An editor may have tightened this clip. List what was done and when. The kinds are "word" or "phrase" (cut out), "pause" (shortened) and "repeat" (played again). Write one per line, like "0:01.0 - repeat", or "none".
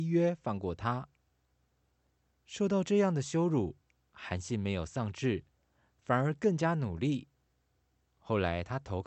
none